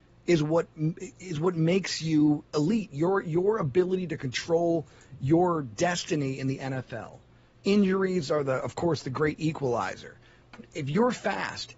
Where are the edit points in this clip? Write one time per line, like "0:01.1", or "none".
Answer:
none